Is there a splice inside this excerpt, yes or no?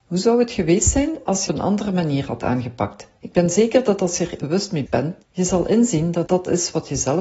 yes